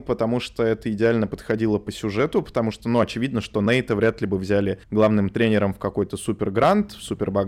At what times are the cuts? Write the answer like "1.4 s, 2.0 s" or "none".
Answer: 4.8 s